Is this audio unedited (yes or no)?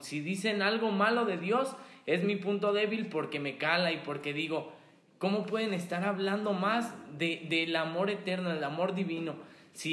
yes